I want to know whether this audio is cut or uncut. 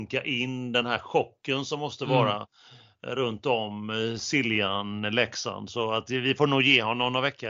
uncut